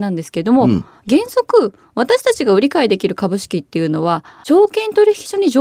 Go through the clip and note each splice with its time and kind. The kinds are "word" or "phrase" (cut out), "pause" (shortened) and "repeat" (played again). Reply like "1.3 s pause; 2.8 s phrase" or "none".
4.3 s pause